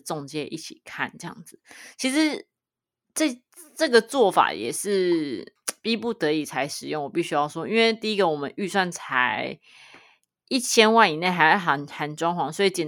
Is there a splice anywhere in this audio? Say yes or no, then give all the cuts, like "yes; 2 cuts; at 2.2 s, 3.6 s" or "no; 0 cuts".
no; 0 cuts